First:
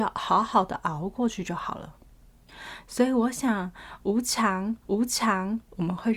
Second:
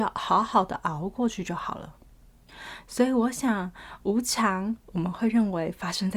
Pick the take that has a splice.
first; 1 cut; at 4.8 s

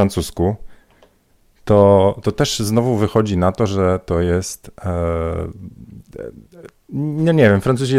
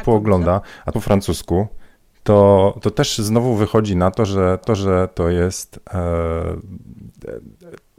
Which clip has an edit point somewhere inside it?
second; 3 cuts; at 0.9 s, 2.0 s, 4.6 s

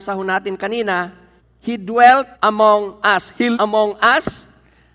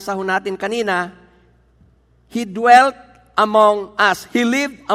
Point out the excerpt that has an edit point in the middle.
first; 3 cuts; at 1.4 s, 2.3 s, 3.5 s

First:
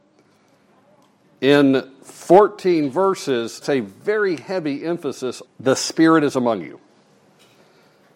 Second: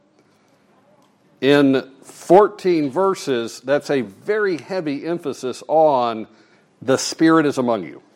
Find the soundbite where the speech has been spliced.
first; 2 cuts; at 3.6 s, 5.5 s

